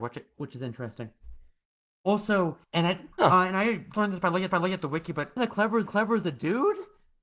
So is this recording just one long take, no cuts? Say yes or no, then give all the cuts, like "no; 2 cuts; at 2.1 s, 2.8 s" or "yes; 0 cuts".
no; 6 cuts; at 2.6 s, 3.1 s, 3.9 s, 4.5 s, 5.4 s, 5.9 s